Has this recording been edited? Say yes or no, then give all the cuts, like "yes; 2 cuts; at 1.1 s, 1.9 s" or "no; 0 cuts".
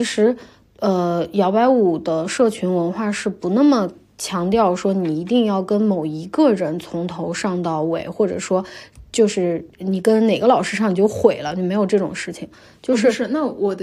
yes; 1 cut; at 9.7 s